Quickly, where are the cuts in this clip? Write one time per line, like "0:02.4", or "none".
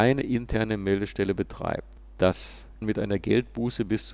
0:02.8